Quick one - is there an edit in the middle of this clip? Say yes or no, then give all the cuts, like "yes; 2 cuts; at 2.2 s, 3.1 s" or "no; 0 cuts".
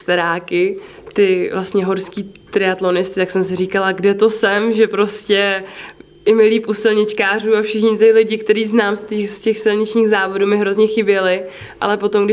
no; 0 cuts